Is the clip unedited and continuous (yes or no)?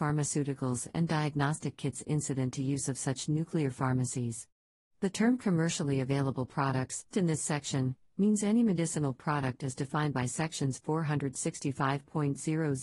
no